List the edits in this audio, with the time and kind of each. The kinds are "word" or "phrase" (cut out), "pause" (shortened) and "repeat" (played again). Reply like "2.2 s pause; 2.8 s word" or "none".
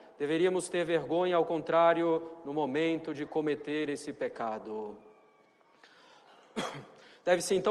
none